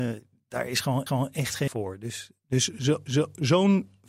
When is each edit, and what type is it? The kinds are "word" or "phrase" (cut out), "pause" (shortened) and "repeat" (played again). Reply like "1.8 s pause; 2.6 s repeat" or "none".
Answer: 1.1 s repeat; 1.7 s word; 3.1 s repeat